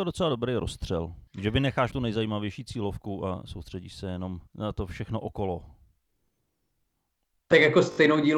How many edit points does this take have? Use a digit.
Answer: 3